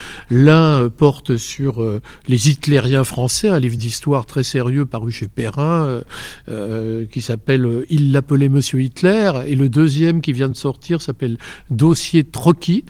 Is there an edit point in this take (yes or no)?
no